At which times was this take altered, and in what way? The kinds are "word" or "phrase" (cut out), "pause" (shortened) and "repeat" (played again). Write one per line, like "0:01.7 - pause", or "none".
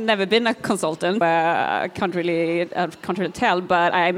0:01.2 - word